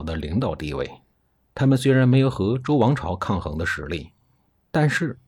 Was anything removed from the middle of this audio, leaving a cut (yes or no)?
yes